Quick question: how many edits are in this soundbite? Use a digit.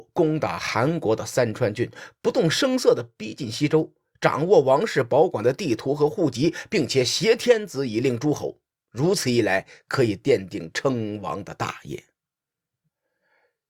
0